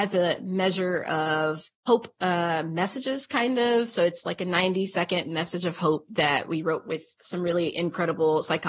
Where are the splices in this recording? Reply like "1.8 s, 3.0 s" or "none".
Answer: 1.7 s